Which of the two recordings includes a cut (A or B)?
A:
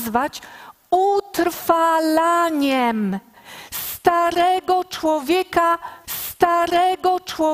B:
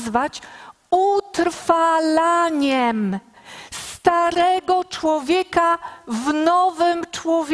A